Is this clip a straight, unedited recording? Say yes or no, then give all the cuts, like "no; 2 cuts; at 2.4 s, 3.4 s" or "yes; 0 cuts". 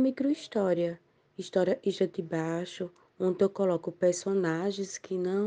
yes; 0 cuts